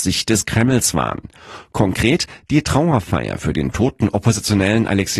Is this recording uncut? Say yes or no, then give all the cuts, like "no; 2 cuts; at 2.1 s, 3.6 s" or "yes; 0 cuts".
yes; 0 cuts